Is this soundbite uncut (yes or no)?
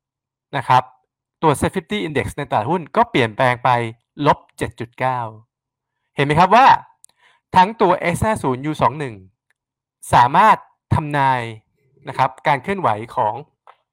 yes